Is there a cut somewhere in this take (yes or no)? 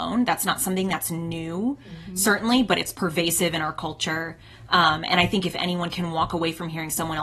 no